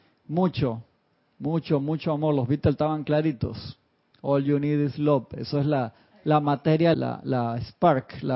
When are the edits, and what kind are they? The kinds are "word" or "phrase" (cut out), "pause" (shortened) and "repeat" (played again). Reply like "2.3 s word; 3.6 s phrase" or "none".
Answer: 6.9 s word